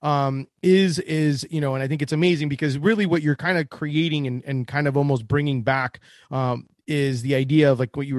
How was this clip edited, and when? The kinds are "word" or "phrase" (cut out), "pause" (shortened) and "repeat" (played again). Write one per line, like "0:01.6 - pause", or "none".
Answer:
none